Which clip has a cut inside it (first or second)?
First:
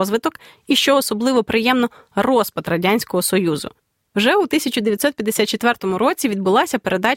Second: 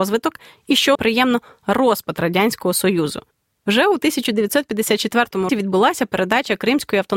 second